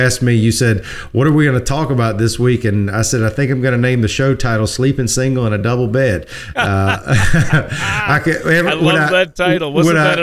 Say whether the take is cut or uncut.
uncut